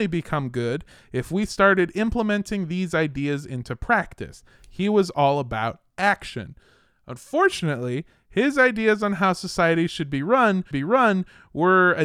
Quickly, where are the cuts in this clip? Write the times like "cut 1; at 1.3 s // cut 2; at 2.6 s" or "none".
cut 1; at 10.7 s